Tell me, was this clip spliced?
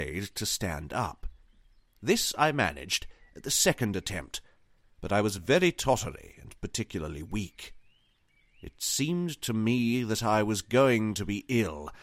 no; 0 cuts

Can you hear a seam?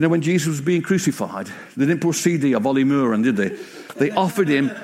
no; 0 cuts

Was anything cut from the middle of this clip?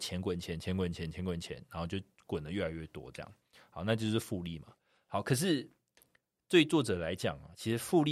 no; 0 cuts

